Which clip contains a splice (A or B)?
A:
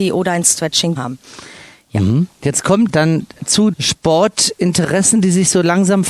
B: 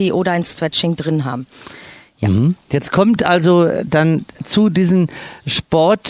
A